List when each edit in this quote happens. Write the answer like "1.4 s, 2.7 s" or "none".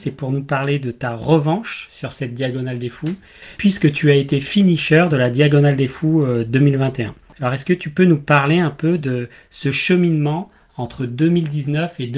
none

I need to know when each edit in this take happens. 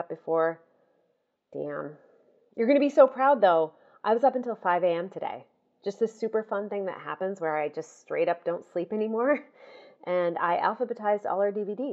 none

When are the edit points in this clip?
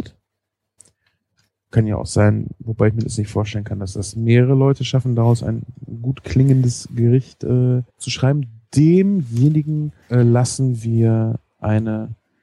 7.9 s, 10.0 s

